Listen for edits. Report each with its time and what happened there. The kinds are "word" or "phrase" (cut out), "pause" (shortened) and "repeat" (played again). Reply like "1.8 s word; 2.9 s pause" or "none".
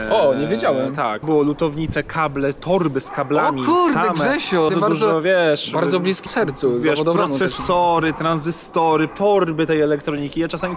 1.2 s phrase; 4.7 s phrase; 6.3 s word; 9.1 s word